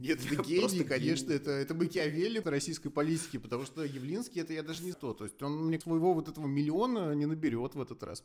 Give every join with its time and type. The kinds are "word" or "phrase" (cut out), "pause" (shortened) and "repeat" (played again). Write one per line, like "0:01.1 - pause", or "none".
0:02.4 - word
0:04.9 - word
0:05.8 - word